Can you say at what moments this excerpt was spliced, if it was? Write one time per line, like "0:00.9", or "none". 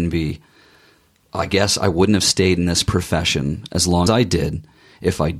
0:04.1